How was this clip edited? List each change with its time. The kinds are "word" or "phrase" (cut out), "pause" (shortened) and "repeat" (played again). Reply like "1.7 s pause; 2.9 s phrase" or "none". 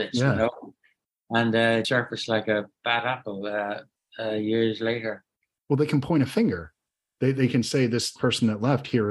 1.8 s word; 8.2 s phrase